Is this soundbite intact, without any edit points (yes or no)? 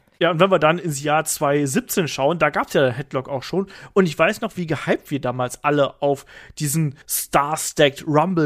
no